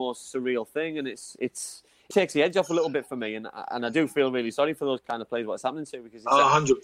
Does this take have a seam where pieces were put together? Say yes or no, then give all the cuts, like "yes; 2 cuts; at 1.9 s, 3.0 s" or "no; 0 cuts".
yes; 1 cut; at 2.1 s